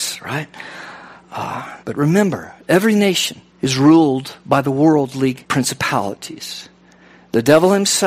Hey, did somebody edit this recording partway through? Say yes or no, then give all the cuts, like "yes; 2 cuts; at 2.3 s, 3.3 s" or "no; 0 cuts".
yes; 3 cuts; at 1.8 s, 3.5 s, 5.4 s